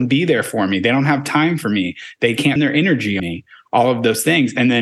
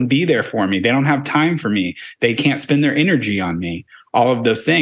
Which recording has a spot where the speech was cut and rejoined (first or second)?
first